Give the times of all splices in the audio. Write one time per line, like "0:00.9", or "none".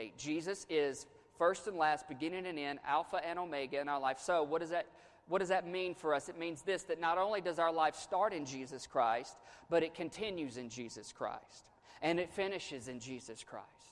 none